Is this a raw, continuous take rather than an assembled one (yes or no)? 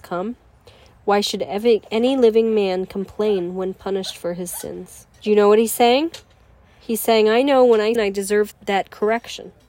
no